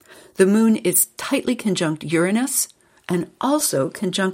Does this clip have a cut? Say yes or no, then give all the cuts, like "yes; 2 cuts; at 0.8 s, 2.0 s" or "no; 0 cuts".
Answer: no; 0 cuts